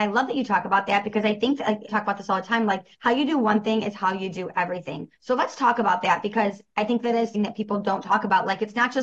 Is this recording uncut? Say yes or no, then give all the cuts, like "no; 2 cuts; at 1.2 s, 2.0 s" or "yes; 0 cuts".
no; 4 cuts; at 1.9 s, 2.9 s, 5.2 s, 7.3 s